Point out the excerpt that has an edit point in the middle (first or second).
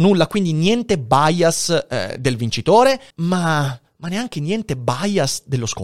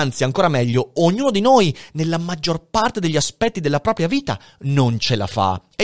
first